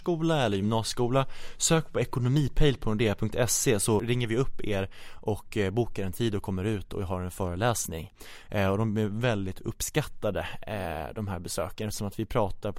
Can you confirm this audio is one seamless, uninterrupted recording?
yes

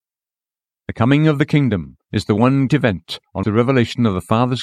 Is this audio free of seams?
no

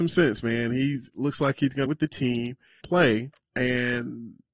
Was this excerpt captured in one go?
no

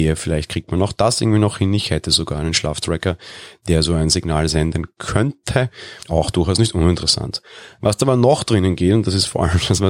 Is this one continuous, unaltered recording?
no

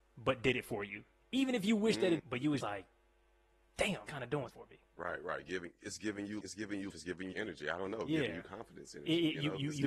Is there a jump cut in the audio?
yes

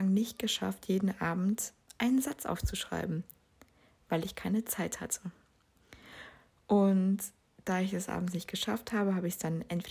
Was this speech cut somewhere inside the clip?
no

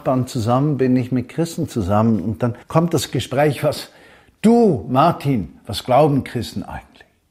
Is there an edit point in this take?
yes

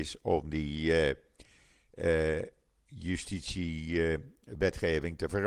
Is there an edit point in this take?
no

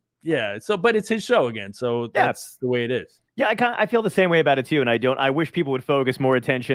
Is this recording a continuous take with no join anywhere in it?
no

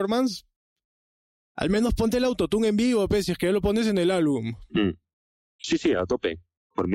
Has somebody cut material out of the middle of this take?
no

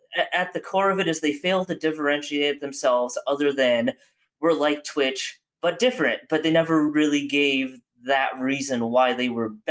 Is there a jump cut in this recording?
no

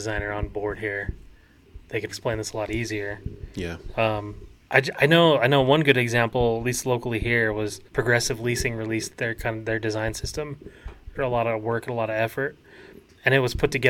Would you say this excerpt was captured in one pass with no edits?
no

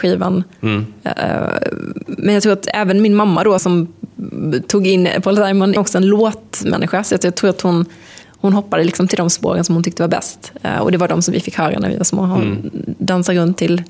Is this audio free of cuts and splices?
no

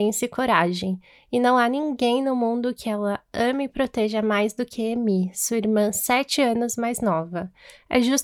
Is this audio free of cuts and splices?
yes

